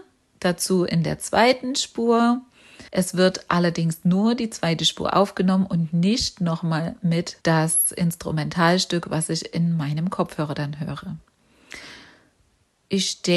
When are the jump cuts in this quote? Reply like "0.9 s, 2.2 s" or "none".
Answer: 2.9 s, 7.4 s